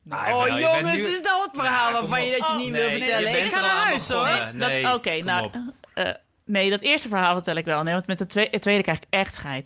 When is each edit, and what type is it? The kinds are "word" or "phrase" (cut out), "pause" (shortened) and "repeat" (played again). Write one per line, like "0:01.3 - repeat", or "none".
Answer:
0:01.5 - word